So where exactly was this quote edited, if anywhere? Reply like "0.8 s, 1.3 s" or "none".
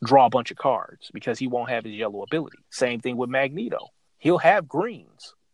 2.6 s, 4.1 s